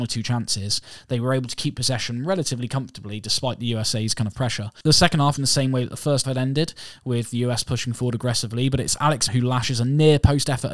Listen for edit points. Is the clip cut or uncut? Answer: cut